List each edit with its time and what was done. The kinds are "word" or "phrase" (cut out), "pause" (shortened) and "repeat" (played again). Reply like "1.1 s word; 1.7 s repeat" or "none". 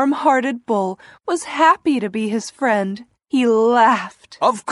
none